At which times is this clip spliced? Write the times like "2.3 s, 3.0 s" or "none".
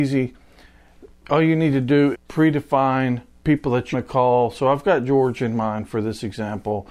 2.1 s, 3.4 s, 3.9 s